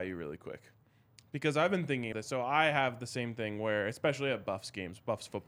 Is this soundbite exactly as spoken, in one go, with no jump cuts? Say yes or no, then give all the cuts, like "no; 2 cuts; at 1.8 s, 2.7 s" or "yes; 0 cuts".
no; 1 cut; at 2.1 s